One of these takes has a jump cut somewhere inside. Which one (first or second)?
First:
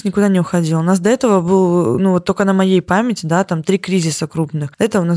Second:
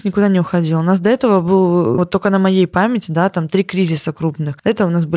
second